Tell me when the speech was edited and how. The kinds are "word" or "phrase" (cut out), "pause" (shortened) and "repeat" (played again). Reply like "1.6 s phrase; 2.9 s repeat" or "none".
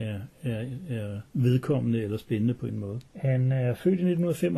1.3 s pause; 2.7 s word; 3.1 s pause